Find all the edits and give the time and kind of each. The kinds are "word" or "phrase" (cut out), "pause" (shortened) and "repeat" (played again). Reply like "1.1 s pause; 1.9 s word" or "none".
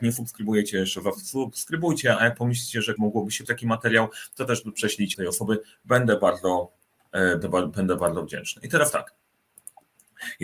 3.0 s word; 3.5 s word; 5.1 s word; 7.4 s word